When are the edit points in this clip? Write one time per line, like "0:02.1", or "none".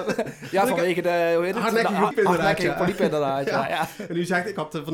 0:02.1